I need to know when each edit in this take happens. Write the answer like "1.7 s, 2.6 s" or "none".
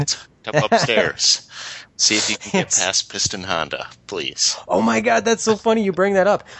none